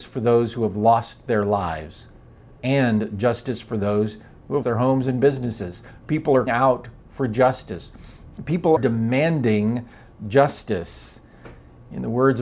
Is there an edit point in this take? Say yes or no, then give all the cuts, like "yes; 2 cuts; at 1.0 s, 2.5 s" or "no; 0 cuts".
yes; 3 cuts; at 4.6 s, 6.5 s, 8.8 s